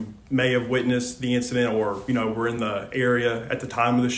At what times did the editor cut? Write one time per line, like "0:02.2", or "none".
none

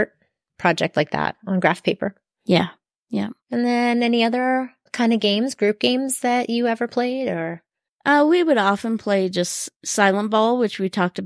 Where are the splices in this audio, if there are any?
0:03.4
0:04.9
0:09.7

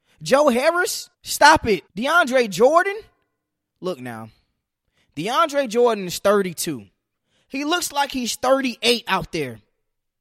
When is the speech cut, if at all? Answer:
0:01.1
0:01.9

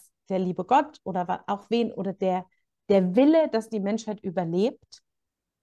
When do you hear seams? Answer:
none

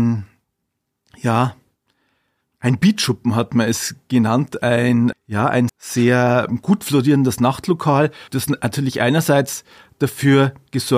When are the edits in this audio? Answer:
0:05.1
0:05.7
0:08.3

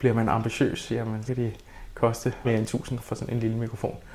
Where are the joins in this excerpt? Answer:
0:01.3
0:02.4
0:03.0

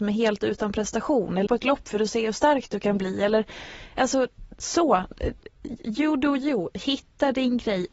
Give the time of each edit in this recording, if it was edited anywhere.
0:01.5

